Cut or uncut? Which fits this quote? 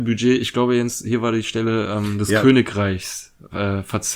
uncut